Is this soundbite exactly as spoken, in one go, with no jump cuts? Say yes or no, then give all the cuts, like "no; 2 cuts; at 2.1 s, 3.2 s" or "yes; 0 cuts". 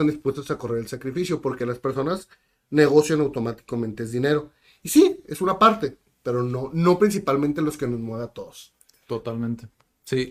yes; 0 cuts